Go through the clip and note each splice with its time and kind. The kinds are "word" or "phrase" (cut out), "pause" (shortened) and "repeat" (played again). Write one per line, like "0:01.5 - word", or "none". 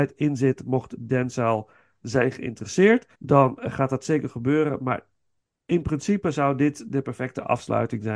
0:03.1 - pause

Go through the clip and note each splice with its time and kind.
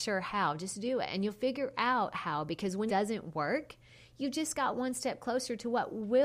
0:02.9 - word

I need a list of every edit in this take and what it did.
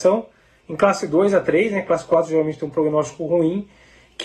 none

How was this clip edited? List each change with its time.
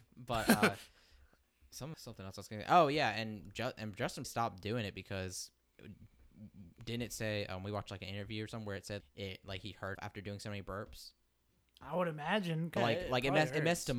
0:01.9 - word
0:04.2 - word
0:09.0 - word
0:09.9 - word
0:12.8 - word

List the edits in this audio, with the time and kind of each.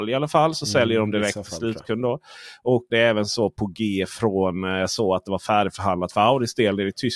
0:02.9 - word

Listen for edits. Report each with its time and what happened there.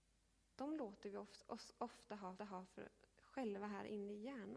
0:02.4 - repeat

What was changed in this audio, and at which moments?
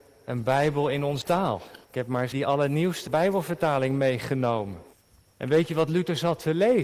0:01.2 - word
0:01.8 - pause
0:02.3 - word
0:03.1 - word
0:04.9 - pause

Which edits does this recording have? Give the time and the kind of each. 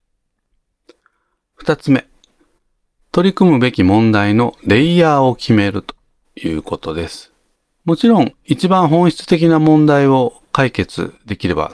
0:07.6 - pause

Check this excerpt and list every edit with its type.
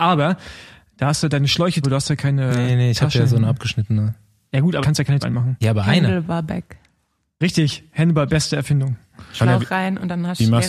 0:01.8 - word
0:04.8 - word
0:05.2 - word
0:08.3 - word

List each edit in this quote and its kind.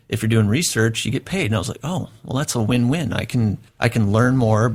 0:03.7 - pause

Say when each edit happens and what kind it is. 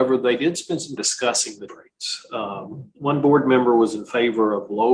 0:01.0 - word
0:01.7 - word
0:02.9 - pause

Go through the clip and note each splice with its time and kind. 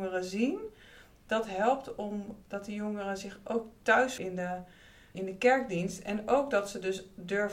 0:02.4 - word
0:04.2 - word
0:05.1 - word

